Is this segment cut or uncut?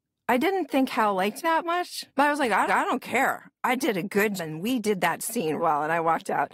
cut